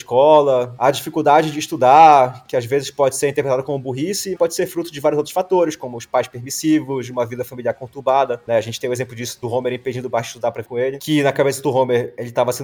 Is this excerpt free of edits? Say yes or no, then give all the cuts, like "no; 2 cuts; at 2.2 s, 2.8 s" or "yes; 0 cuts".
no; 2 cuts; at 4.3 s, 10.6 s